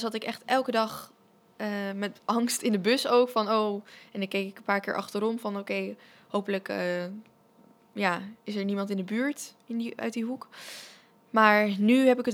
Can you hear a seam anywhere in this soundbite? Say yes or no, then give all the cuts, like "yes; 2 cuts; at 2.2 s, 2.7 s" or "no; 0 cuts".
yes; 1 cut; at 8.4 s